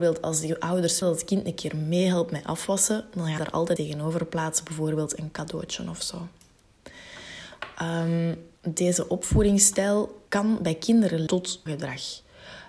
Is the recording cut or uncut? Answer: cut